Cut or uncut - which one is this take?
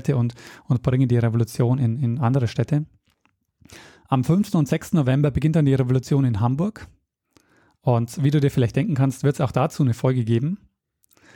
uncut